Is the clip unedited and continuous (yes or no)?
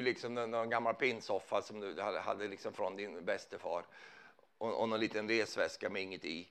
yes